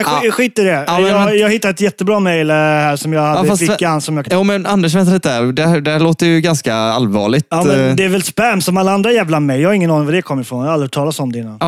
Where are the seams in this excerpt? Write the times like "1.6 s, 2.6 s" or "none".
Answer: 4.3 s